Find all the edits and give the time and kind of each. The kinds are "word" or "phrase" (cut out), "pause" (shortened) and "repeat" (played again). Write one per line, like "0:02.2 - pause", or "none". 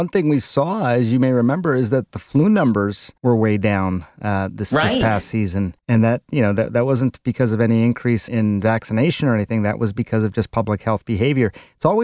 0:03.2 - pause
0:05.8 - pause
0:08.3 - word